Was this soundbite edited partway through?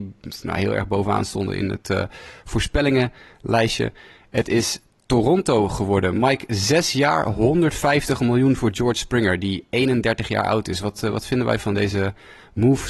no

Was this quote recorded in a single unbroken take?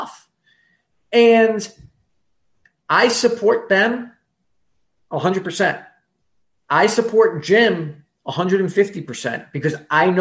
yes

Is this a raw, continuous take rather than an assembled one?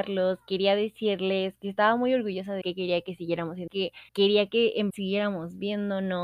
no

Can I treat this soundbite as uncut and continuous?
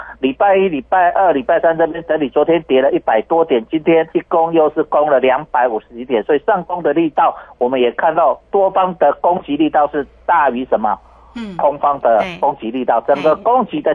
no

